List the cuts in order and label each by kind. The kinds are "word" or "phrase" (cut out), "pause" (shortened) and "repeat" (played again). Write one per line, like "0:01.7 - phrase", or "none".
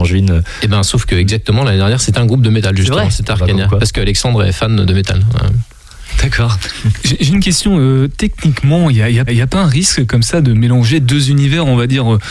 0:04.8 - word
0:09.3 - repeat